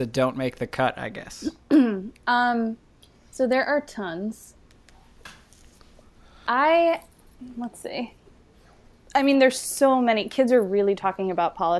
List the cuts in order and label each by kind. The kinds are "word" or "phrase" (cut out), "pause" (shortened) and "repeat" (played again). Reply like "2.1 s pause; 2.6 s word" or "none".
none